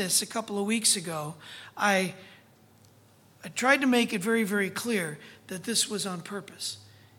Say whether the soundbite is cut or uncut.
uncut